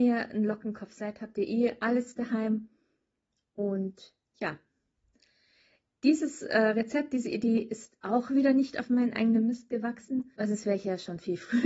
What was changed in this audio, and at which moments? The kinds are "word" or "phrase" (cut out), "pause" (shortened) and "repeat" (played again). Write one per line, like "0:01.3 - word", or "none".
0:10.3 - pause